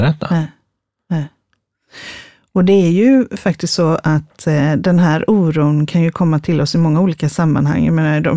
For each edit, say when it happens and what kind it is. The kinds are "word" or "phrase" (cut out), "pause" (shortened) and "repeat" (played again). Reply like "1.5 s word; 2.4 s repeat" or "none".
none